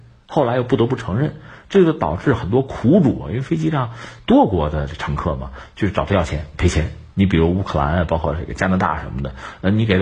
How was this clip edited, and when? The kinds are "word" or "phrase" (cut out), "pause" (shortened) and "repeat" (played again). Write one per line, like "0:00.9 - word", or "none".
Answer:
0:07.1 - pause